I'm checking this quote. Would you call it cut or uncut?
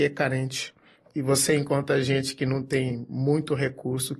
uncut